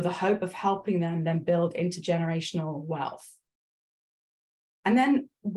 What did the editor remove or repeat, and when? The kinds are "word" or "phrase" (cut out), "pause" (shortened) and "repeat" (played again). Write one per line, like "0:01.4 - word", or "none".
none